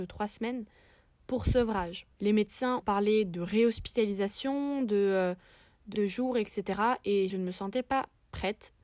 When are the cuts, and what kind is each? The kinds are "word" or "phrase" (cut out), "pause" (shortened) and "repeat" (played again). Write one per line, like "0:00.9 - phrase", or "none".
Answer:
0:02.1 - pause
0:02.8 - word
0:05.9 - word
0:07.3 - phrase

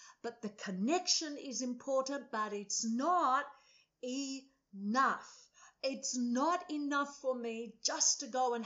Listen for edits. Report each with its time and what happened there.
none

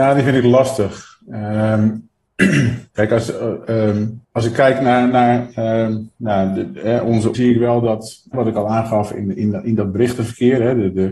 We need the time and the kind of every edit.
0:02.9 - pause
0:04.2 - pause
0:06.1 - pause
0:07.3 - phrase
0:08.3 - word

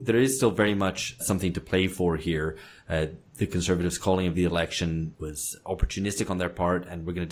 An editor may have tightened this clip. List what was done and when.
0:01.2 - word
0:05.1 - word

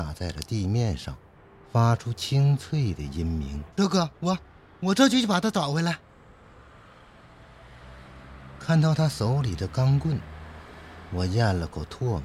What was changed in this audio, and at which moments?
0:01.3 - pause
0:03.7 - pause
0:04.1 - pause

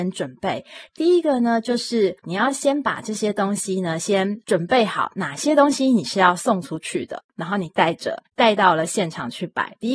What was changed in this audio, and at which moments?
0:02.2 - pause
0:08.3 - pause

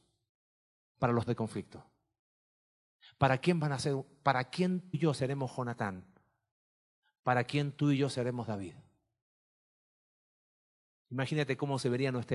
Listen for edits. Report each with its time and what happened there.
0:01.3 - word
0:04.9 - word

